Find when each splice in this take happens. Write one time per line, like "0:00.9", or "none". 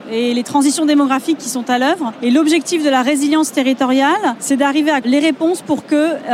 0:05.0